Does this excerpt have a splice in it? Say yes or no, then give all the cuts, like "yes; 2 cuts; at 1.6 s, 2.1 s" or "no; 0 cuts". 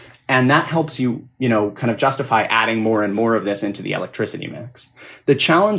no; 0 cuts